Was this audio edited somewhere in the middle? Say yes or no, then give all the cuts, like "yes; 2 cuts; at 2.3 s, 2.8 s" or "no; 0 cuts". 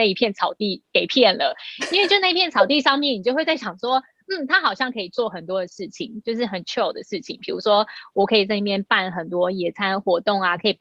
no; 0 cuts